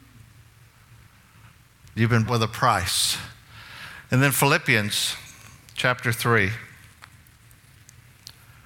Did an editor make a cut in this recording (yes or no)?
yes